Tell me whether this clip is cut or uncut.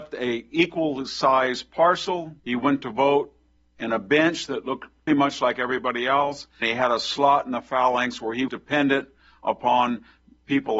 cut